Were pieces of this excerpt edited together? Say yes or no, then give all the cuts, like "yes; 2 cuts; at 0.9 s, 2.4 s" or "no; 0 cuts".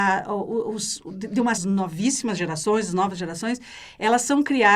yes; 1 cut; at 1.6 s